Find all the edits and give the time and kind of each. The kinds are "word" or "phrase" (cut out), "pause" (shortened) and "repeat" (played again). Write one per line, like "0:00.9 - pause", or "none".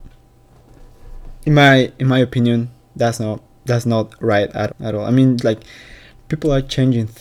0:04.7 - word
0:05.4 - word